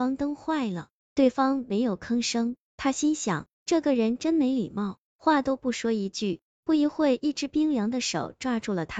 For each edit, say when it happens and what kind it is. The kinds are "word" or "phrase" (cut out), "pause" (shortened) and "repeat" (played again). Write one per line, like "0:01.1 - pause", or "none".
0:03.5 - pause